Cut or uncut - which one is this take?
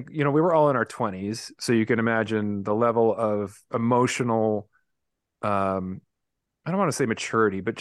uncut